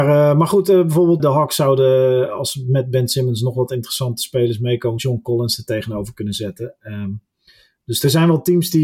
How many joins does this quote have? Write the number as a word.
two